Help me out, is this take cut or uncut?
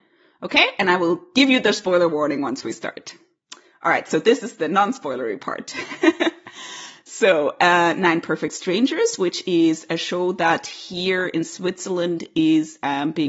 uncut